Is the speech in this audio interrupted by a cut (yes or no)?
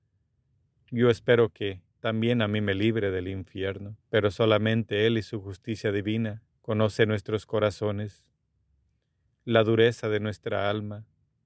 yes